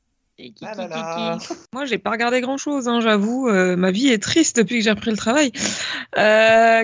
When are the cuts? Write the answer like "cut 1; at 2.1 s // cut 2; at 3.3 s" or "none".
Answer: cut 1; at 1.6 s